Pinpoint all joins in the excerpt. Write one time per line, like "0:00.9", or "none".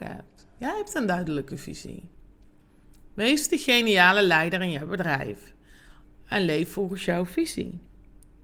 none